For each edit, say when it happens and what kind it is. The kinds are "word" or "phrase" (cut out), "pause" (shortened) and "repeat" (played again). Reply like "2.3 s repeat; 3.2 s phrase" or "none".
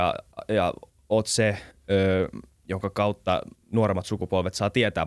2.5 s pause; 3.6 s pause